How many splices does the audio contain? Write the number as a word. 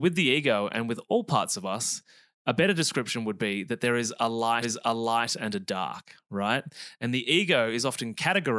one